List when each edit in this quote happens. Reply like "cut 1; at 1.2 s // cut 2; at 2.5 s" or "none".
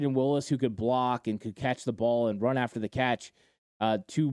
none